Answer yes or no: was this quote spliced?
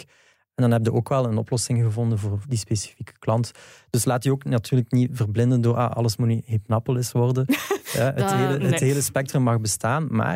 no